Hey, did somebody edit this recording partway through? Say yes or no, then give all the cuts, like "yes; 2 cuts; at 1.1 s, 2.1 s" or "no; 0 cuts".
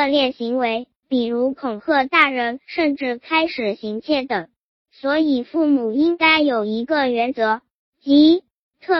yes; 1 cut; at 1.0 s